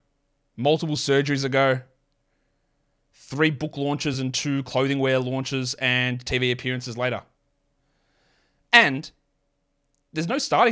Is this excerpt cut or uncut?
uncut